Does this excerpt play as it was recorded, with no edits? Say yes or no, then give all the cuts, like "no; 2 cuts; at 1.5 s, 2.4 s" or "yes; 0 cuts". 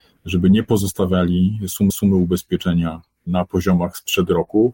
no; 1 cut; at 1.9 s